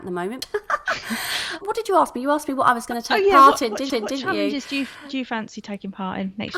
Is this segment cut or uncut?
cut